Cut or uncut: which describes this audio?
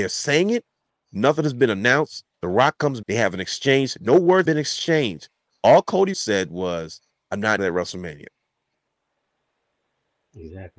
cut